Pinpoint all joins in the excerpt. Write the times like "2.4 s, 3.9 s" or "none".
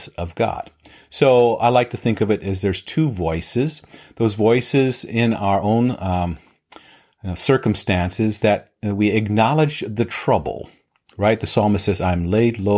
none